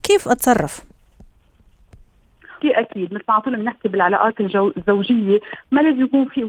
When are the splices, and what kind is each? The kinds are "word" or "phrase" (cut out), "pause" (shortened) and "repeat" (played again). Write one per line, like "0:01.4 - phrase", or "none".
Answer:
0:02.6 - phrase